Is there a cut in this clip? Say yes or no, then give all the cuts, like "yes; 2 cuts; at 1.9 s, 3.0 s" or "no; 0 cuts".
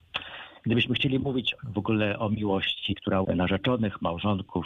yes; 2 cuts; at 1.6 s, 3.2 s